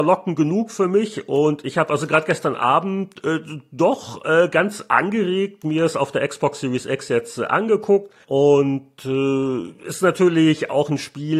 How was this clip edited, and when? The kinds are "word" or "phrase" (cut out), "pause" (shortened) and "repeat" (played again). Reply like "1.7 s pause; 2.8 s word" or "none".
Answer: 8.2 s pause